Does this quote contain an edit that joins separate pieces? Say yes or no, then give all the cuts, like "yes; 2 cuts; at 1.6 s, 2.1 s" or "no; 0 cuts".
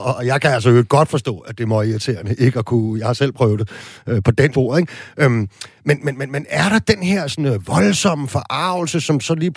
yes; 1 cut; at 4.5 s